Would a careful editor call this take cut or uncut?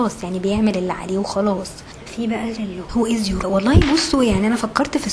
cut